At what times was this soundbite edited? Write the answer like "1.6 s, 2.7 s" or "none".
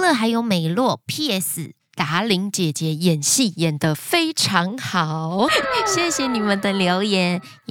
5.5 s